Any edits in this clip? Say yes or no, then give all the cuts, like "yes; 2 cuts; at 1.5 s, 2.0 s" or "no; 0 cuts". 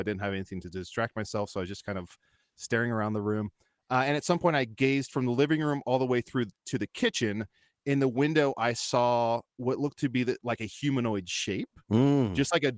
no; 0 cuts